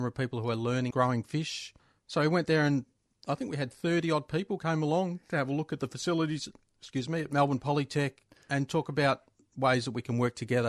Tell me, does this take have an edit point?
yes; 3 cuts; at 0.9 s, 1.8 s, 6.6 s

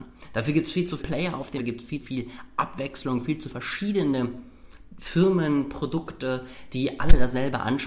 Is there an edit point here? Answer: yes; 4 cuts; at 1.0 s, 1.6 s, 2.0 s, 3.5 s

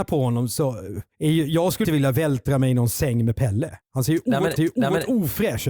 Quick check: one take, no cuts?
no; 4 cuts; at 1.1 s, 1.8 s, 3.8 s, 4.6 s

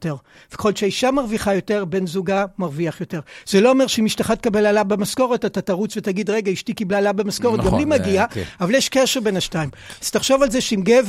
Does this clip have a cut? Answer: no; 0 cuts

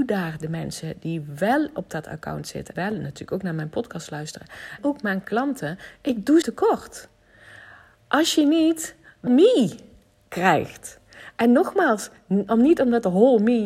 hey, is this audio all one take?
no; 4 cuts; at 2.8 s, 4.8 s, 6.4 s, 9.3 s

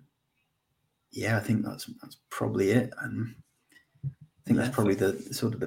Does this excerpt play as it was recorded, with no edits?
yes; 0 cuts

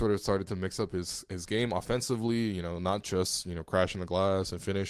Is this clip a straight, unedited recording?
yes; 0 cuts

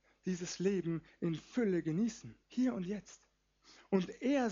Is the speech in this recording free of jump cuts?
no; 1 cut; at 2.4 s

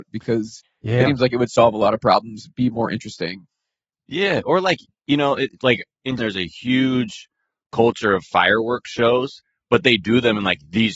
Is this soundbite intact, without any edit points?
no; 2 cuts; at 1.1 s, 6.2 s

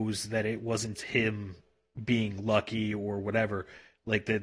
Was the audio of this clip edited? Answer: yes; 1 cut; at 1.0 s

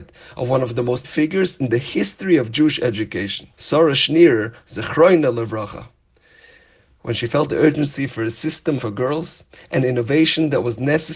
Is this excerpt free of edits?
no; 3 cuts; at 1.0 s, 3.5 s, 8.8 s

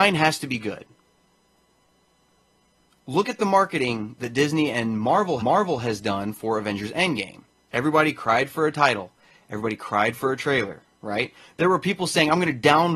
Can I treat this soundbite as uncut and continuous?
no; 1 cut; at 5.4 s

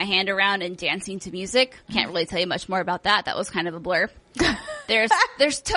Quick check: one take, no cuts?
yes; 0 cuts

